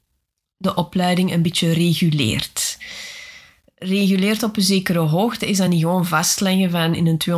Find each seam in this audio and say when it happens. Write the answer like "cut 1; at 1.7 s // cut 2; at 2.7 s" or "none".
none